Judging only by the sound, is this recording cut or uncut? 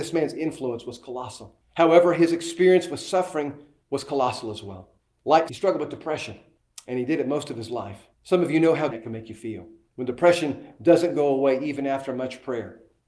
cut